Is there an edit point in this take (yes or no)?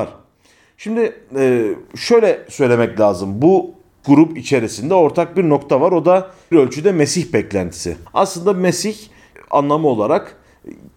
yes